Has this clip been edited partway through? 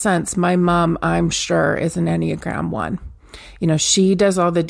no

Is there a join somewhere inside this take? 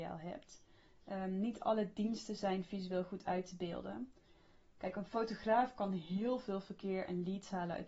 no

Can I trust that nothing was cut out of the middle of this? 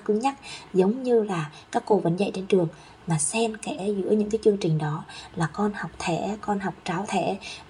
yes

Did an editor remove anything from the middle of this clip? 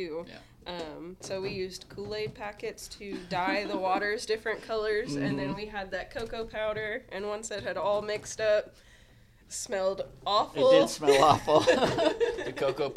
no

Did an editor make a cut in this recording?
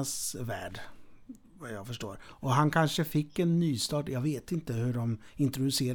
no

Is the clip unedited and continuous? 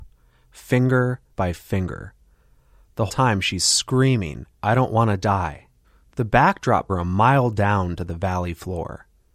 no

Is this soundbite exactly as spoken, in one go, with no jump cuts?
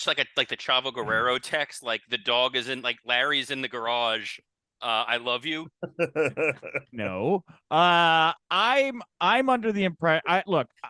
yes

